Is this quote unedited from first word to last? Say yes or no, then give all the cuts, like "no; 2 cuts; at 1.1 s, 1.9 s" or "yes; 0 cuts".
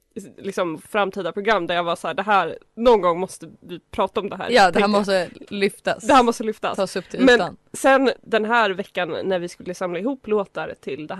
no; 2 cuts; at 2.7 s, 8.2 s